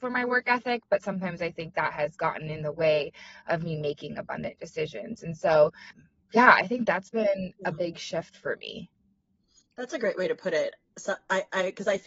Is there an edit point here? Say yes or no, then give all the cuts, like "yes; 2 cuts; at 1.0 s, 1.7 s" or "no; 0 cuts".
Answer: no; 0 cuts